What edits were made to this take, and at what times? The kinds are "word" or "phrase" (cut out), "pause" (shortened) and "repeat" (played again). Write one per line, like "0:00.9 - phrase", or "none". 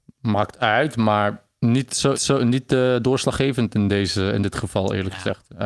0:02.1 - repeat